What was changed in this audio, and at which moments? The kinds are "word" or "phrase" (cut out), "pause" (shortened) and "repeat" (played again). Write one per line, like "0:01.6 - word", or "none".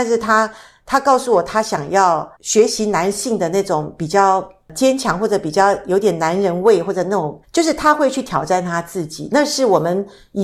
0:02.4 - pause
0:07.4 - pause

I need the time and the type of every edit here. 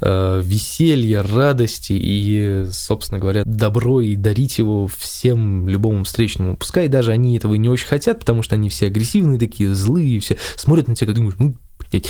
0:03.4 - phrase
0:11.1 - phrase

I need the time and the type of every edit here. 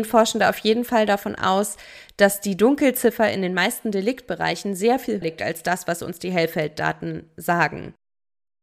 0:05.2 - word

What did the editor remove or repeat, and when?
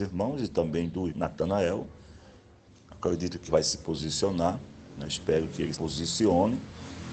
0:01.1 - word
0:03.5 - word
0:05.7 - word

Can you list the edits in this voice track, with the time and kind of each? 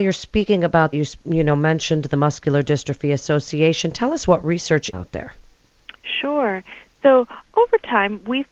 0:00.9 - word
0:04.9 - phrase

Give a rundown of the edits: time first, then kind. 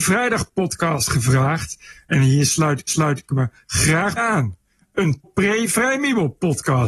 0:02.9 - repeat
0:04.2 - word
0:05.2 - word

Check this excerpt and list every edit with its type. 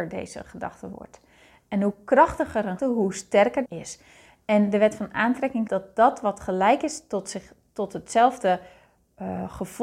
0:02.8 - word
0:03.7 - phrase
0:05.7 - word

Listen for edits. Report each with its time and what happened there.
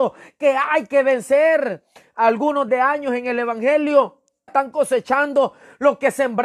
0:02.7 - word
0:04.5 - word

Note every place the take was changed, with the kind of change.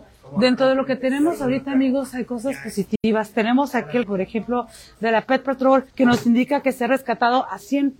0:04.0 - word
0:05.9 - pause

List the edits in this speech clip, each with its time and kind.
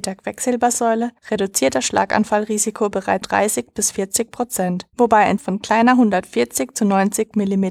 0:01.2 - pause
0:03.2 - word
0:04.9 - pause
0:05.4 - word

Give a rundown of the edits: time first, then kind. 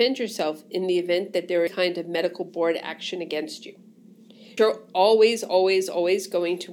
0:01.7 - phrase
0:04.6 - word

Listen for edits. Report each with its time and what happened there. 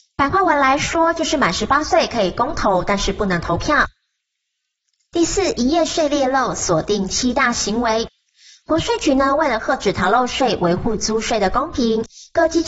none

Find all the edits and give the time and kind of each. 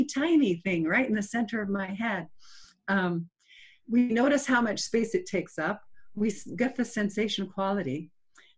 none

